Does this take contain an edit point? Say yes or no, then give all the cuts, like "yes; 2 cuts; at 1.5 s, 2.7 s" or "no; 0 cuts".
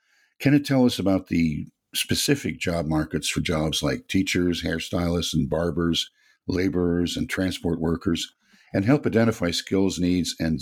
no; 0 cuts